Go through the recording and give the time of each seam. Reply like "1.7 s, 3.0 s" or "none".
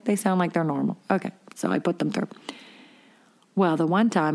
none